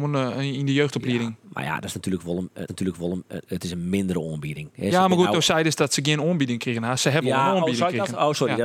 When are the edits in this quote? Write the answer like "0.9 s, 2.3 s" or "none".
2.7 s